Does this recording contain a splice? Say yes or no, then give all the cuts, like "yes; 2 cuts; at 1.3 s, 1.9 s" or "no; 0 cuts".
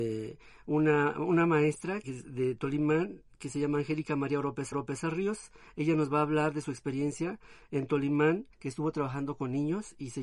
yes; 3 cuts; at 2.0 s, 4.7 s, 8.5 s